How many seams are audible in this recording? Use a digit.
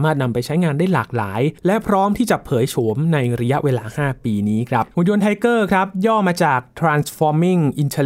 2